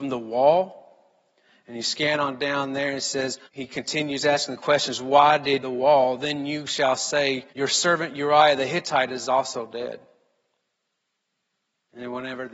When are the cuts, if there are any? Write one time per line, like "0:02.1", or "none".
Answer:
0:03.4
0:05.6
0:07.5